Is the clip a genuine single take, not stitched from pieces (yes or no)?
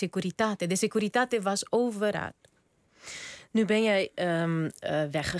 yes